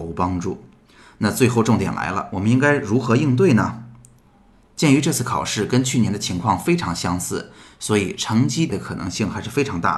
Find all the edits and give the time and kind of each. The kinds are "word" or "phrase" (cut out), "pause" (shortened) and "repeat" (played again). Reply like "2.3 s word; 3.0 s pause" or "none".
8.7 s word

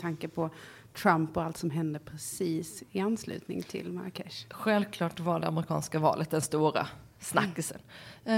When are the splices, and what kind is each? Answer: none

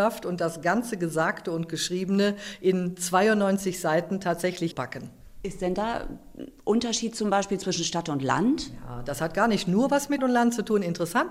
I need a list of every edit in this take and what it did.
4.7 s phrase; 10.2 s word

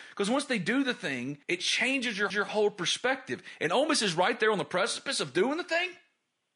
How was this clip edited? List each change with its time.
1.4 s pause; 2.3 s repeat

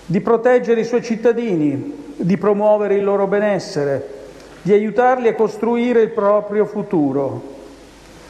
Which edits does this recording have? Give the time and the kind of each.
none

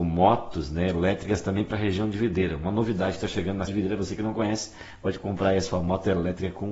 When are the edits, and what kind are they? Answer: 3.7 s word

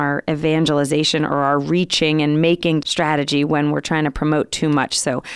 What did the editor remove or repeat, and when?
2.8 s word

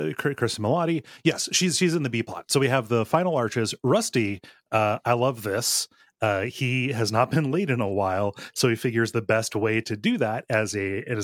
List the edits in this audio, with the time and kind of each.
none

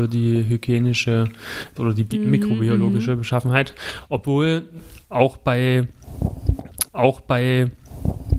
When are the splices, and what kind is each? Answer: 1.8 s word; 6.9 s repeat

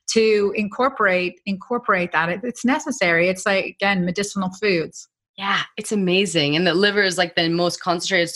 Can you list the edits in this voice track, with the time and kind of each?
5.3 s pause

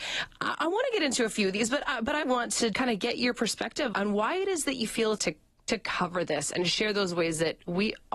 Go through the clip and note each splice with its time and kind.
2.2 s word; 2.7 s word; 3.9 s word; 5.2 s word

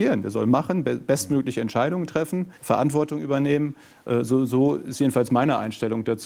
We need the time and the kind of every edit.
2.6 s pause

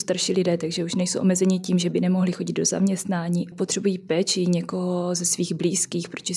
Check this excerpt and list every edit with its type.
3.5 s phrase

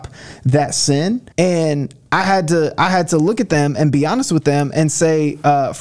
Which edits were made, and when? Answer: 1.3 s pause

